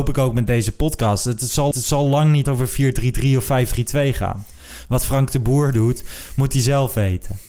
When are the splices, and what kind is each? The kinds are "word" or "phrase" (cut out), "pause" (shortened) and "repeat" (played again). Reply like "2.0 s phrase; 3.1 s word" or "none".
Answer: 1.7 s repeat; 2.4 s word